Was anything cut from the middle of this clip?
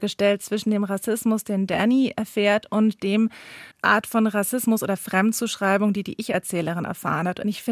yes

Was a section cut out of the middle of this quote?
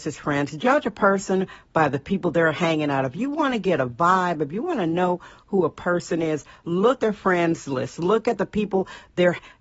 yes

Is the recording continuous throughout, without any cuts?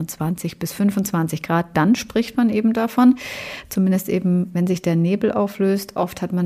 yes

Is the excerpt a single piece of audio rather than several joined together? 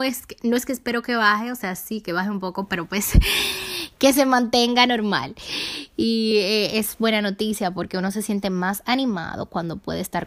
yes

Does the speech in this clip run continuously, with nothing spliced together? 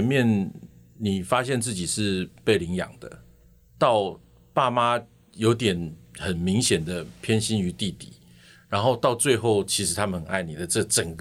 yes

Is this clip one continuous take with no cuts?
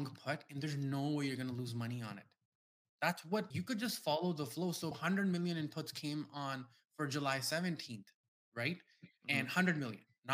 no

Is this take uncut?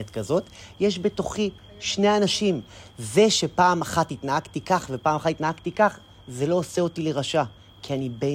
yes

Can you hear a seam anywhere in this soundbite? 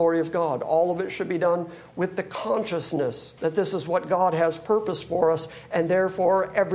yes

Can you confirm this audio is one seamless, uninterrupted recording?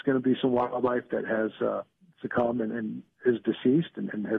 yes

